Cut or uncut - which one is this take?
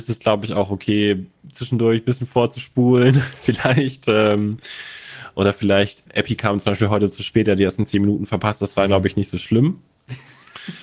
cut